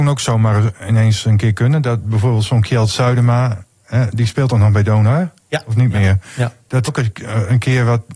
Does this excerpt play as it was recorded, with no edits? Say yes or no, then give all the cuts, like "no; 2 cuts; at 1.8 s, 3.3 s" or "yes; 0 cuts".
no; 1 cut; at 6.9 s